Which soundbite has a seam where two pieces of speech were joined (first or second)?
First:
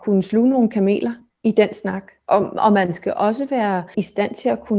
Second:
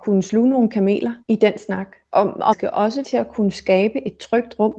second